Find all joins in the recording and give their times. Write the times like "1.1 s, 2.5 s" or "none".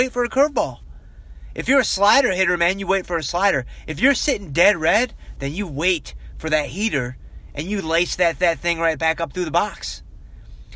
8.4 s